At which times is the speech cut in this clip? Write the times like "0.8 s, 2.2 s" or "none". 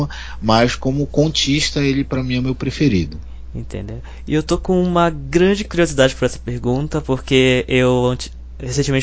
none